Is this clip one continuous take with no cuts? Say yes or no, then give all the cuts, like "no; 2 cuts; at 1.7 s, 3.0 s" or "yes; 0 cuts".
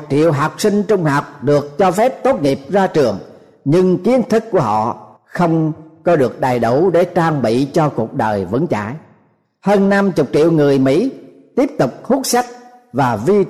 no; 1 cut; at 5.2 s